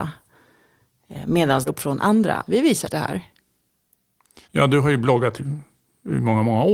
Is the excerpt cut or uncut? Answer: cut